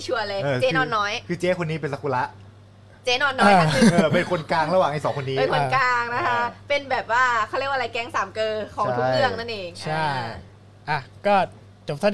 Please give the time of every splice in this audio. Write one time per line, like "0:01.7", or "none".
none